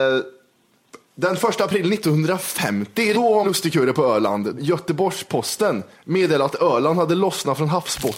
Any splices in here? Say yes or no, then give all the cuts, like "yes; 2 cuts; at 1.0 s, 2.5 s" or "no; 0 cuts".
yes; 4 cuts; at 3.1 s, 3.4 s, 4.6 s, 5.9 s